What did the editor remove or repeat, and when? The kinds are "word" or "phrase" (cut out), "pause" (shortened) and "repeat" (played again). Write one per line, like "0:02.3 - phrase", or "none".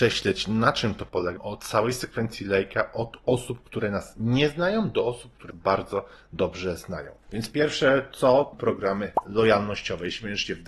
0:01.4 - phrase
0:05.5 - word
0:07.2 - pause
0:08.5 - phrase